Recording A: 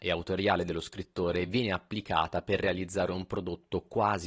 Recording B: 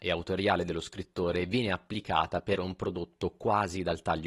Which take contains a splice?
B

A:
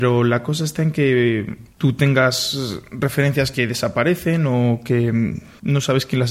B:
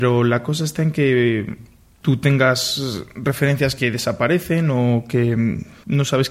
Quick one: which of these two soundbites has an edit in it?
A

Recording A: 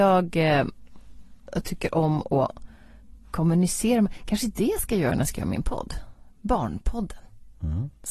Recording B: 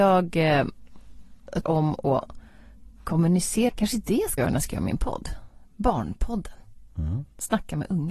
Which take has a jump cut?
B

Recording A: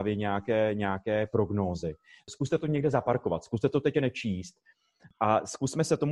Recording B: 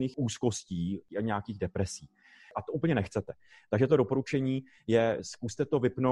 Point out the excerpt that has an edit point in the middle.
A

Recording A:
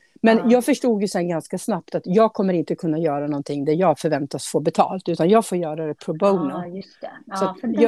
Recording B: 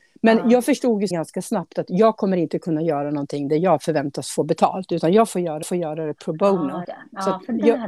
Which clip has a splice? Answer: B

